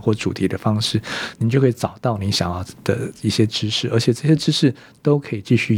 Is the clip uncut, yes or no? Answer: yes